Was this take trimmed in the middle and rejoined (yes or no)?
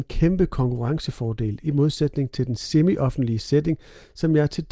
no